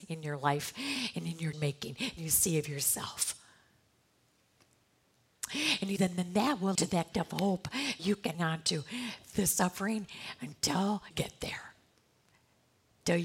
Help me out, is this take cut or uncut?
cut